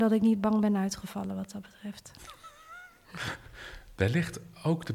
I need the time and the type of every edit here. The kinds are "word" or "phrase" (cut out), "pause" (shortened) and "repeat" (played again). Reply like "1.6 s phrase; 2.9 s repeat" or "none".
none